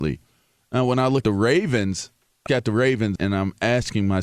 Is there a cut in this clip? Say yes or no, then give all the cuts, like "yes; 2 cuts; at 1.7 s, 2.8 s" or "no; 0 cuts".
yes; 3 cuts; at 1.2 s, 2.5 s, 3.2 s